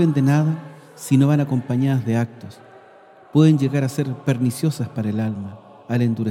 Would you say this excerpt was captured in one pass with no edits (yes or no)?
yes